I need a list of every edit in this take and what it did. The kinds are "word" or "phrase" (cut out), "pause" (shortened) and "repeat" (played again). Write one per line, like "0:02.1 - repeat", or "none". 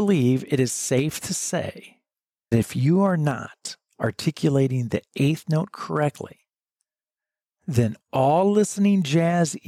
0:02.5 - word